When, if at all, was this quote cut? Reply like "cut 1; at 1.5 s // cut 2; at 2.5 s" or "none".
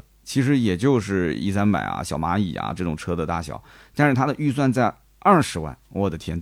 none